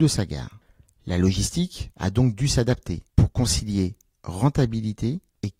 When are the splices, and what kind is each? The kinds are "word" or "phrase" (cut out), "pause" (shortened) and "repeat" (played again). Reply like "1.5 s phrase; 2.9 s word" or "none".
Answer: none